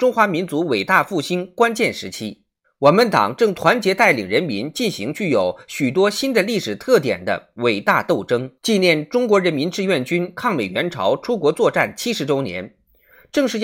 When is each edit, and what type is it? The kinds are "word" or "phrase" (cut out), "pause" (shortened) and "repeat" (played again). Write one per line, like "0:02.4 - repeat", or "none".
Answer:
0:02.6 - pause
0:08.6 - pause